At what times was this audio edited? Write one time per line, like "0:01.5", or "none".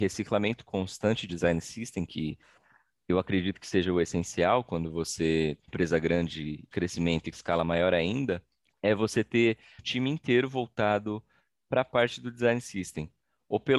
0:01.3
0:05.7
0:06.7
0:07.3
0:08.6
0:09.8